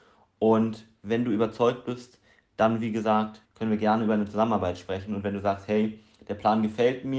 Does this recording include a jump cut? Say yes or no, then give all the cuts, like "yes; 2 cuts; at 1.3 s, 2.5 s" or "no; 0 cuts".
yes; 1 cut; at 3.4 s